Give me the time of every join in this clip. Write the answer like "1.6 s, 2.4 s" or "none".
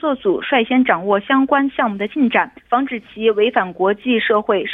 2.6 s